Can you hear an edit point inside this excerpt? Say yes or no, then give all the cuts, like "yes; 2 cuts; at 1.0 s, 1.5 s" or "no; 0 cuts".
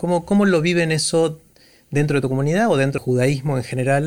yes; 1 cut; at 3.0 s